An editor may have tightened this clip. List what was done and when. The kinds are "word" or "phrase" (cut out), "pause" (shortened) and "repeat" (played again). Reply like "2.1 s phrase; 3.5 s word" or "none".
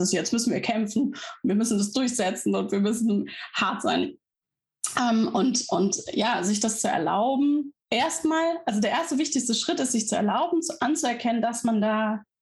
7.8 s pause